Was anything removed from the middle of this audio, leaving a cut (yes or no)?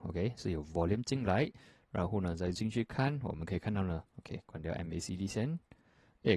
yes